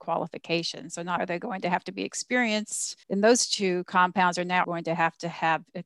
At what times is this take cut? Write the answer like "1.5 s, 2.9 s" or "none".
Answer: 1.2 s, 3.0 s, 4.6 s